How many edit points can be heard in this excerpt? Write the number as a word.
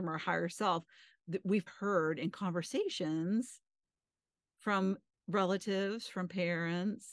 two